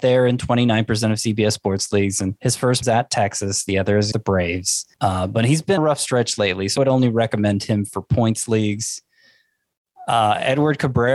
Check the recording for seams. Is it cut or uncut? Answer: cut